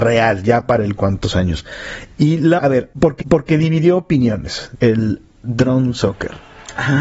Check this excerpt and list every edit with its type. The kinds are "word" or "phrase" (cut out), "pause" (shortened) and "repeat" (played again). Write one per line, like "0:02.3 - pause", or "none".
0:01.0 - phrase
0:02.6 - word
0:03.2 - repeat